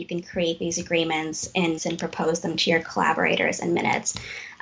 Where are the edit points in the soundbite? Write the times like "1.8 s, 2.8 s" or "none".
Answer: 1.8 s